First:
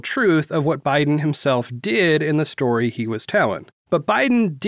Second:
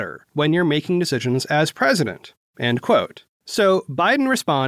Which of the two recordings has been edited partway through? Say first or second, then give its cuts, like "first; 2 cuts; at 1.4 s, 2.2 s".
second; 1 cut; at 3.3 s